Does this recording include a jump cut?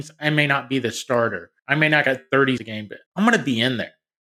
yes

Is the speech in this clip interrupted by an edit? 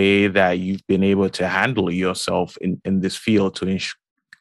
no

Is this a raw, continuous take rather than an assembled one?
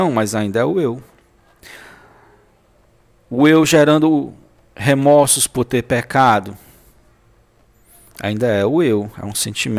yes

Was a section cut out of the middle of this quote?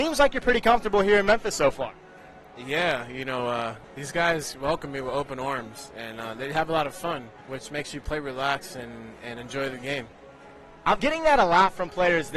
yes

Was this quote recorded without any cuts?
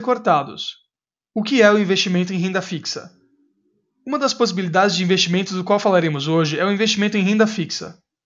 yes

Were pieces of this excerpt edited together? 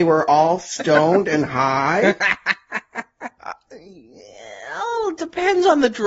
no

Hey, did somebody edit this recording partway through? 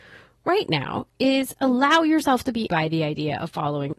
yes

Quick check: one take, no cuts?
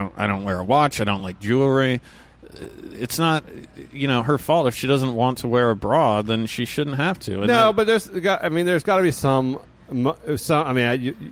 yes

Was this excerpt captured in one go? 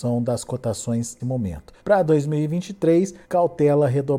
no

